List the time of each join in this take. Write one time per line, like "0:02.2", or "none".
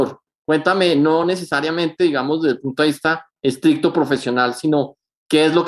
none